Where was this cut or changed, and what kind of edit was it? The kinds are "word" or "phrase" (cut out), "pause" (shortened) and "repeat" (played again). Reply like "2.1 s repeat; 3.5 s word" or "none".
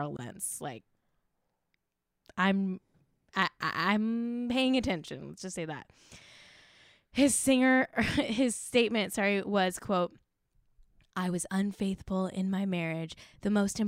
none